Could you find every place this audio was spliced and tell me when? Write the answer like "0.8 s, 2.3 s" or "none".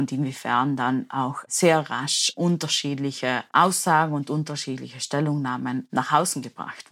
none